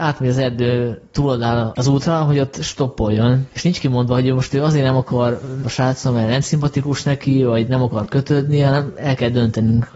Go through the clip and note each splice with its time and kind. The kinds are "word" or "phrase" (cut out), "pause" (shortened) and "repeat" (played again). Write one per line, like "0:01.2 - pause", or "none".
0:05.6 - phrase